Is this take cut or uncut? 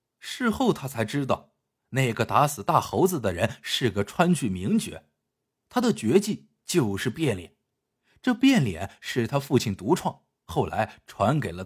uncut